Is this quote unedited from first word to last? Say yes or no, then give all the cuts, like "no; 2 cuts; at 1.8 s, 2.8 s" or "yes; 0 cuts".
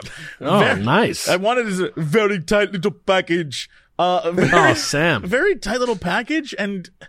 yes; 0 cuts